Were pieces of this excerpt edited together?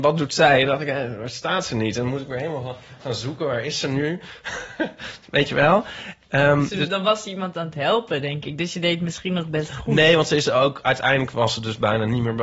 no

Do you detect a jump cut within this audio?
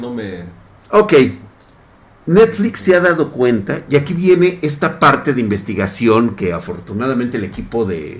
no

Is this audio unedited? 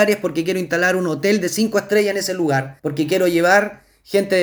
no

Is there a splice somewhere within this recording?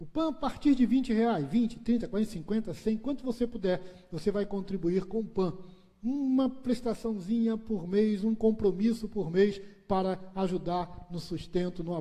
no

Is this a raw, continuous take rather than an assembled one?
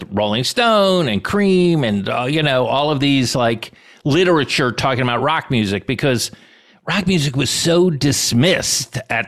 yes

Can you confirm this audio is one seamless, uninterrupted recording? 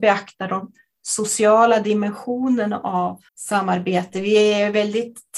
no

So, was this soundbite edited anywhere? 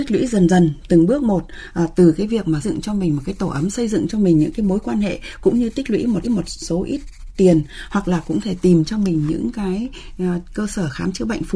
yes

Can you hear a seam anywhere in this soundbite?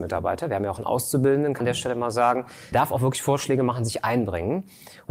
yes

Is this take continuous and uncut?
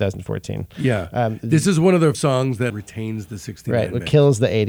no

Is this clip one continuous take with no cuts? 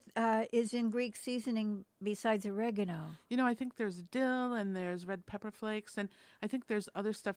yes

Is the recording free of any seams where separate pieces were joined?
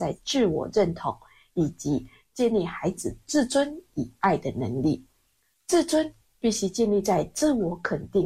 yes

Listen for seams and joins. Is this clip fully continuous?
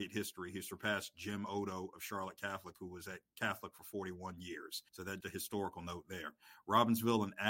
no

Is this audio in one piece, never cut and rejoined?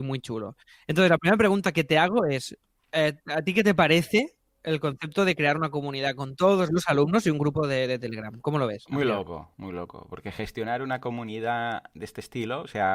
yes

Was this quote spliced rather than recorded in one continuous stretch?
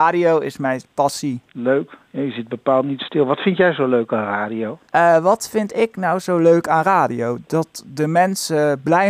yes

